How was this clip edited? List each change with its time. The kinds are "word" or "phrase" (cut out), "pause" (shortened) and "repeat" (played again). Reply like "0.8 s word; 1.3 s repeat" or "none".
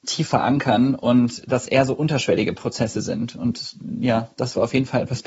1.6 s word